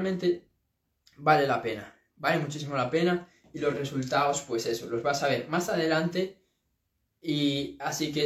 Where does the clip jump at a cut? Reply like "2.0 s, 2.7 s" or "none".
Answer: none